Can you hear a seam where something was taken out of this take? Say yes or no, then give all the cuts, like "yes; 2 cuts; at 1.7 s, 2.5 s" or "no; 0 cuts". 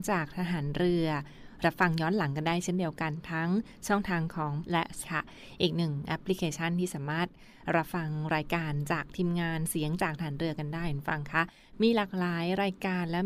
yes; 2 cuts; at 4.6 s, 5.0 s